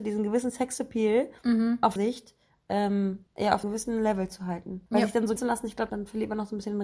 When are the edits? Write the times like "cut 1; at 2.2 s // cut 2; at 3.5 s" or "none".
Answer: cut 1; at 1.4 s // cut 2; at 2.0 s // cut 3; at 3.3 s // cut 4; at 3.6 s // cut 5; at 4.9 s // cut 6; at 5.4 s // cut 7; at 5.9 s